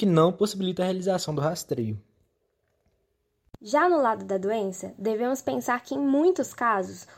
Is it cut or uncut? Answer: uncut